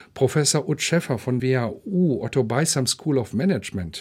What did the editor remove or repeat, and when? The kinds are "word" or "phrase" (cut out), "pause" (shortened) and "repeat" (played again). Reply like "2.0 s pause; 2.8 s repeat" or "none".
1.4 s word